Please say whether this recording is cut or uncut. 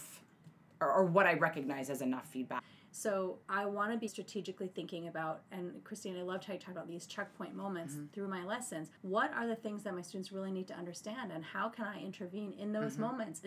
cut